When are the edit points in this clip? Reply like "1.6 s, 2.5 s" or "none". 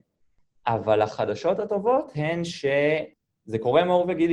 none